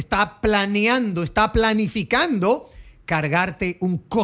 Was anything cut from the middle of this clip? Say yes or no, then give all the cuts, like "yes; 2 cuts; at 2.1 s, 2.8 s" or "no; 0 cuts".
no; 0 cuts